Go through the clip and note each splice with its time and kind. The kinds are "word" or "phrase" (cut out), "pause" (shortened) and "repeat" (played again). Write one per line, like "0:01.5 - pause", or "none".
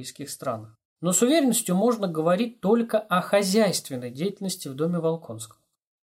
none

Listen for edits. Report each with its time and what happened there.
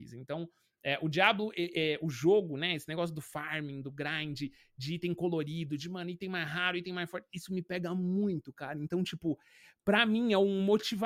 none

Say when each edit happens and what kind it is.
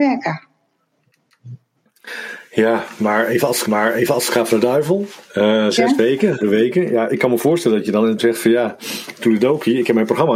0:03.6 - repeat
0:06.4 - word
0:08.2 - word

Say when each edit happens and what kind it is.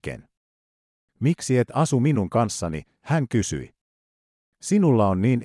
none

